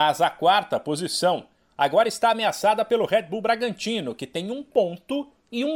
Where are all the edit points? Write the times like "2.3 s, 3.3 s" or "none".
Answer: none